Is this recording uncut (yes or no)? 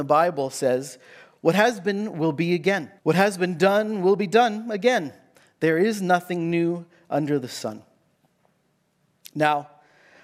no